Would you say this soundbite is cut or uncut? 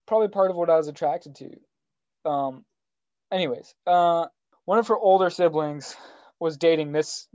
uncut